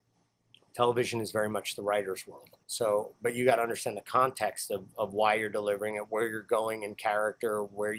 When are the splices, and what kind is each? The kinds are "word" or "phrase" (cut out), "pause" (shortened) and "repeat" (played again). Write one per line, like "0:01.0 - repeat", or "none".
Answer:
0:02.6 - pause